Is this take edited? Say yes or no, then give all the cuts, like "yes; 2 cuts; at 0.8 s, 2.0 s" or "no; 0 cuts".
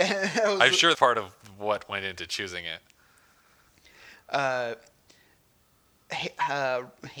yes; 1 cut; at 0.9 s